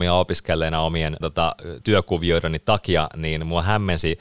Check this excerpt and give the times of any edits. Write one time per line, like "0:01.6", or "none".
0:01.2
0:01.8